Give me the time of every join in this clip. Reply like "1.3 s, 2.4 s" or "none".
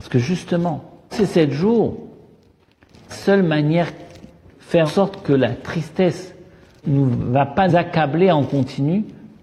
1.1 s, 3.1 s, 4.5 s, 4.9 s, 6.8 s, 7.7 s

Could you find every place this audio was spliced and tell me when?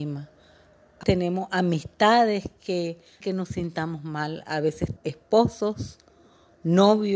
1.0 s, 3.2 s, 5.0 s

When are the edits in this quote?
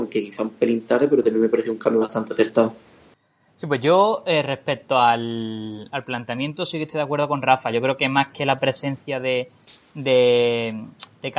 3.1 s

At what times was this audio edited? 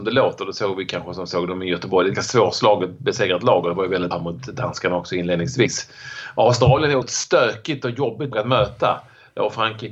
2.1 s, 4.1 s, 7.0 s, 8.3 s

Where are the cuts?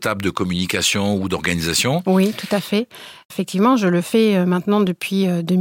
none

